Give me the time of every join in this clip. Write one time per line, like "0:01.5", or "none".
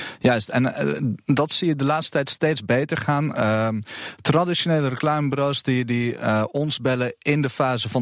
none